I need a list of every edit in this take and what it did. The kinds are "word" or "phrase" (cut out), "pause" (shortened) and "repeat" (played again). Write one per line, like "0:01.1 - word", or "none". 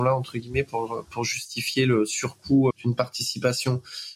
0:02.7 - word